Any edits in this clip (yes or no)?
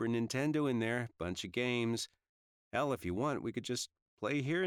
no